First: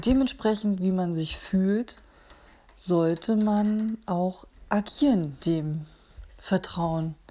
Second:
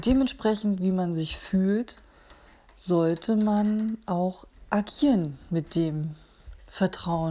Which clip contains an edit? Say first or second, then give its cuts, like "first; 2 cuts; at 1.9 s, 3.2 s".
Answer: first; 1 cut; at 5.4 s